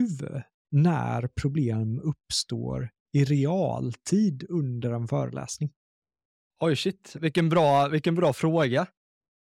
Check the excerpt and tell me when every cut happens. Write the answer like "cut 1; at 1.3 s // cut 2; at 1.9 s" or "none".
none